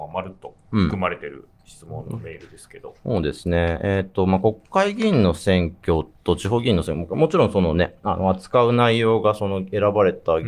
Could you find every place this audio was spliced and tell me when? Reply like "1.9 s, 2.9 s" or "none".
none